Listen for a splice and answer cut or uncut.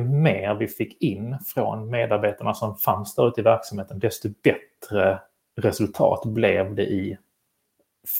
uncut